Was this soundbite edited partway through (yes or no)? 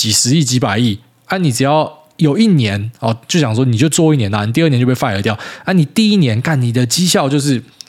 no